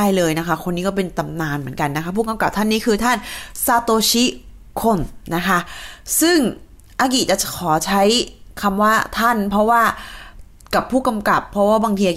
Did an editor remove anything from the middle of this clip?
no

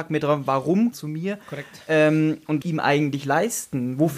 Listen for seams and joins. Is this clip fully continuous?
no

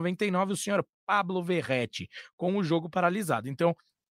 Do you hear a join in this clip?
no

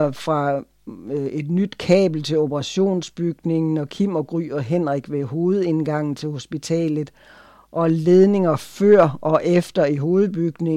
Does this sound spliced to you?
no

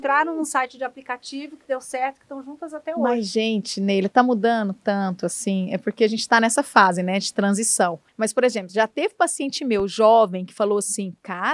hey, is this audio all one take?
no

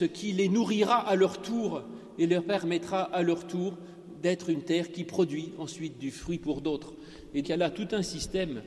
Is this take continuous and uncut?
no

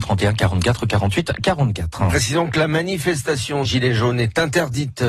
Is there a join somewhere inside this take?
yes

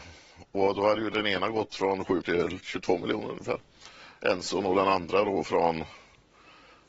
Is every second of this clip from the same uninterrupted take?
no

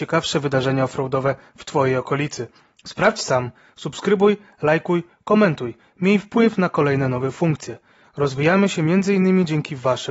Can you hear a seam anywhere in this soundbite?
no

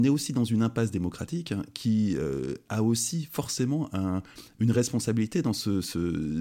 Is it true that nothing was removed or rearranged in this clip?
yes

